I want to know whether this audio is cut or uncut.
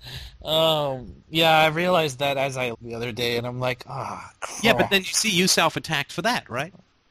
cut